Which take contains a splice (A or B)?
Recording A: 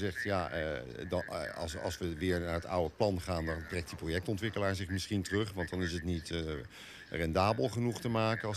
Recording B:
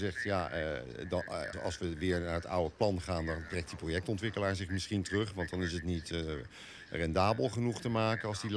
B